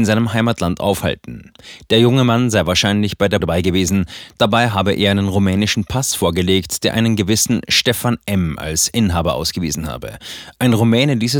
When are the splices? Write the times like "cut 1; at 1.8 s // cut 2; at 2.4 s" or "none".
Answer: cut 1; at 3.4 s